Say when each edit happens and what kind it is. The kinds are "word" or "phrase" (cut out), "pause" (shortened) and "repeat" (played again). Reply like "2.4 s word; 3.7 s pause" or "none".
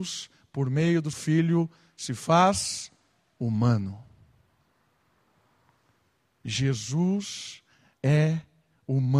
1.1 s word

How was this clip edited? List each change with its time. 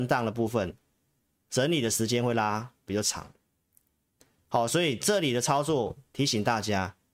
none

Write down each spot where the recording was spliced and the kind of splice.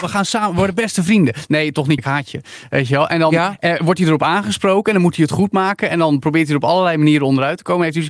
2.0 s word

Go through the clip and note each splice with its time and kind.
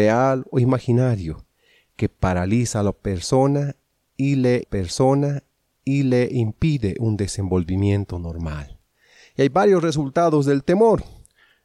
4.6 s repeat

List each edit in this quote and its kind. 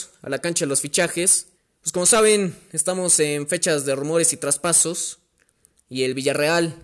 1.6 s pause

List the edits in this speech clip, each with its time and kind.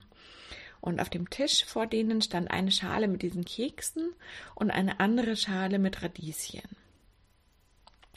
none

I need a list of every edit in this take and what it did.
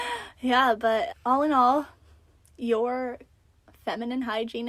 1.1 s word

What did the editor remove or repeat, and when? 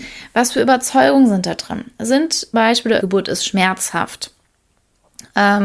2.5 s word; 3.0 s phrase

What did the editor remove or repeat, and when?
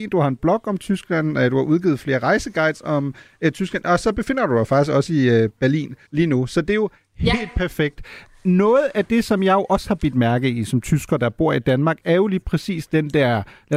6.1 s pause

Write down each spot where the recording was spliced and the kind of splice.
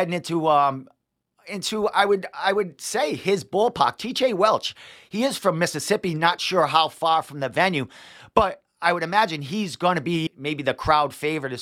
10.3 s word

